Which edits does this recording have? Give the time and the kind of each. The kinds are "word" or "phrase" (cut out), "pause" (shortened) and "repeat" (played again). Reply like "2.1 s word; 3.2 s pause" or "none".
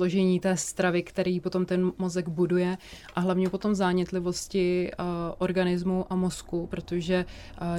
none